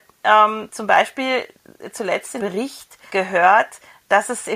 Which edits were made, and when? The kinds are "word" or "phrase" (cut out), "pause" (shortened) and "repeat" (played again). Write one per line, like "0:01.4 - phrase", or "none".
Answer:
0:02.4 - word
0:03.1 - word